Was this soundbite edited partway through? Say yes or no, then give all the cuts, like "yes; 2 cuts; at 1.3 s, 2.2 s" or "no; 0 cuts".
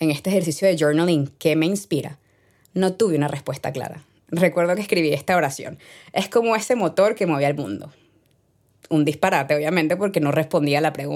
no; 0 cuts